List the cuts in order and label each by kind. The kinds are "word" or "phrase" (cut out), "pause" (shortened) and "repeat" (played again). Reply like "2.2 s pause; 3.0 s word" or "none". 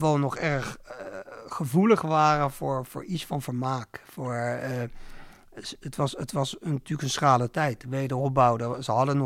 2.9 s word